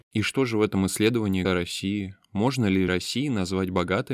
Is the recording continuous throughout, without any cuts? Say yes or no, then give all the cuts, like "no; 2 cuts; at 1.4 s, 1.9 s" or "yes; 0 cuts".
no; 2 cuts; at 1.4 s, 2.9 s